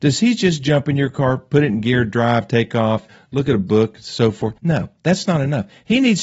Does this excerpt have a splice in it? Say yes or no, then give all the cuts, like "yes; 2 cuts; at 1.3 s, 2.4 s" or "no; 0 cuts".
yes; 1 cut; at 4.6 s